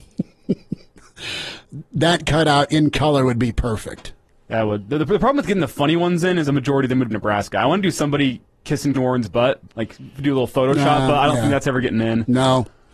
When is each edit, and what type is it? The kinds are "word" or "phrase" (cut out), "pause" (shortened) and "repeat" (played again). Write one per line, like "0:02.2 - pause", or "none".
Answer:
0:04.3 - pause
0:06.4 - phrase
0:07.1 - phrase
0:08.9 - word
0:09.7 - pause

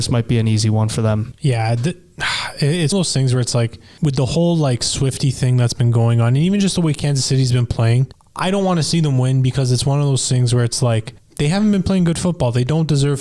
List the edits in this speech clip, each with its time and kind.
0:02.9 - phrase

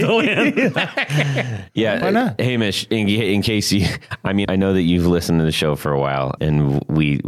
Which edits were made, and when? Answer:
0:02.0 - word
0:04.4 - word
0:06.4 - word

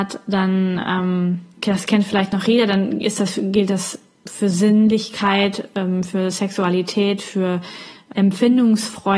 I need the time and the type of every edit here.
0:01.6 - word
0:08.1 - word

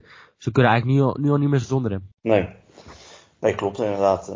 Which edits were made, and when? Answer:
0:02.1 - pause

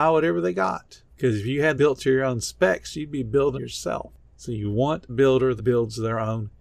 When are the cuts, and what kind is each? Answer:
0:01.8 - word
0:03.5 - word
0:05.1 - word
0:05.6 - word

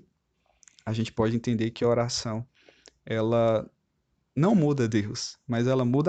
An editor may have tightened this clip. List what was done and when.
none

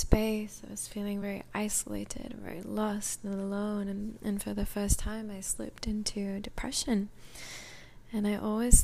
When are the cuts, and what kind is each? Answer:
none

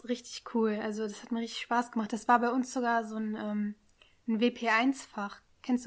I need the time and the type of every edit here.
none

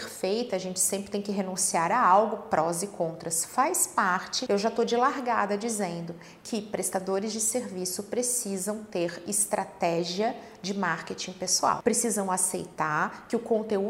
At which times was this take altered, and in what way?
none

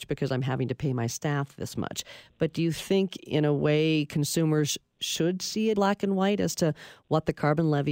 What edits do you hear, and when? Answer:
0:05.8 - word

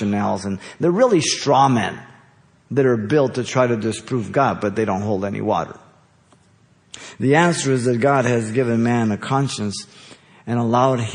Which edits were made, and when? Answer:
none

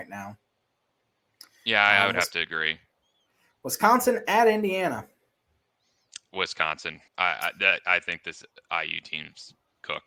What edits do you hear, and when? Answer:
0:07.1 - pause

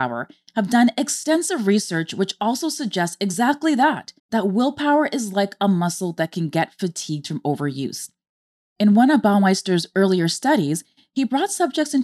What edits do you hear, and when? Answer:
0:04.2 - pause

